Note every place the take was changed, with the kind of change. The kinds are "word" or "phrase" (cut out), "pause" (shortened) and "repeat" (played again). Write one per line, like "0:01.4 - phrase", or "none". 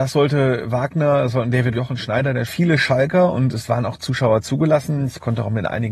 0:01.7 - phrase
0:02.5 - phrase